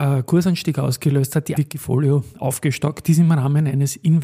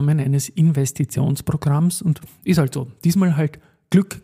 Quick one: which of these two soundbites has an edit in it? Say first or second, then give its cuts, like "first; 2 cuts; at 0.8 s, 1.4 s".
first; 1 cut; at 1.6 s